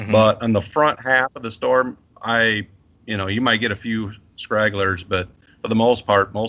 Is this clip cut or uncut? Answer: uncut